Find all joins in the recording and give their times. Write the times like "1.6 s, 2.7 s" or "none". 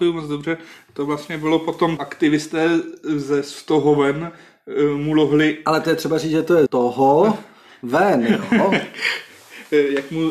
2.0 s, 6.7 s

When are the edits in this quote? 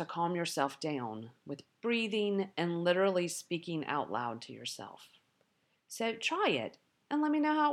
none

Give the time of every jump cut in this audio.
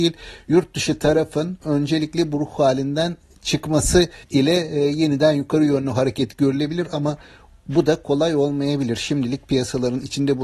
4.2 s

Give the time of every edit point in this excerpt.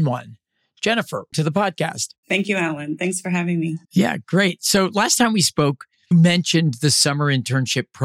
1.3 s, 2.2 s, 3.8 s, 6.1 s

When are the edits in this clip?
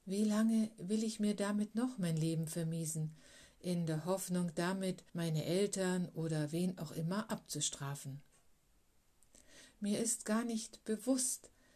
5.1 s

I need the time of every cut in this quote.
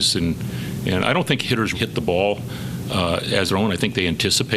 1.7 s, 3.5 s

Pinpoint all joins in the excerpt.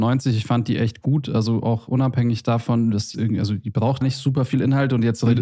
3.1 s, 4.0 s

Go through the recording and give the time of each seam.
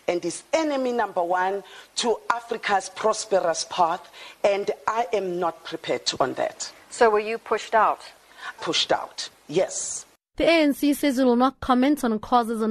6.2 s, 8.6 s

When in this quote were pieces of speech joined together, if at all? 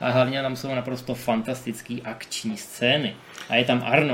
none

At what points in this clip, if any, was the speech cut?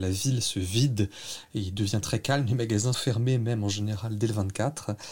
2.0 s, 2.9 s

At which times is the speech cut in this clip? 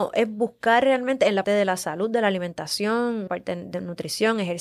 1.4 s, 3.3 s

